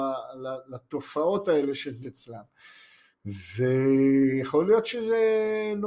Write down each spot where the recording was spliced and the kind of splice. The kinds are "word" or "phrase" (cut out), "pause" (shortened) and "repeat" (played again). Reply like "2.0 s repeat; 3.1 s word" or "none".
2.0 s word